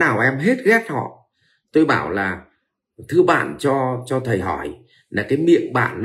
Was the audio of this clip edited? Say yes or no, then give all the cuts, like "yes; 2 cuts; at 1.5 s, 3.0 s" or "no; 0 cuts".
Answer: no; 0 cuts